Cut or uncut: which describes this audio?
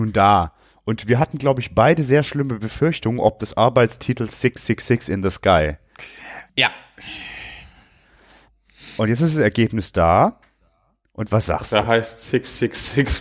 cut